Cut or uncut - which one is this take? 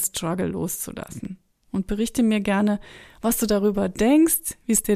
uncut